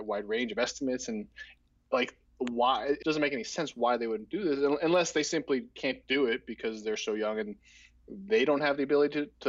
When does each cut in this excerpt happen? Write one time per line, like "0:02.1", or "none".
0:03.0